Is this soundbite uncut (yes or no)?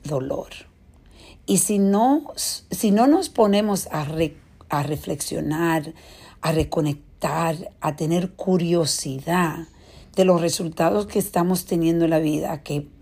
yes